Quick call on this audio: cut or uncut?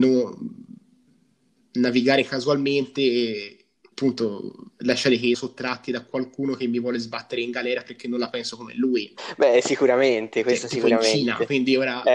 cut